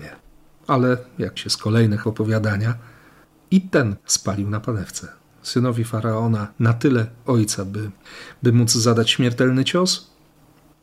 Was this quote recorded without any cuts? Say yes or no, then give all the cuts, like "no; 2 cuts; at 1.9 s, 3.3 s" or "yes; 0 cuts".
no; 6 cuts; at 1.4 s, 2.0 s, 4.0 s, 5.3 s, 6.5 s, 7.3 s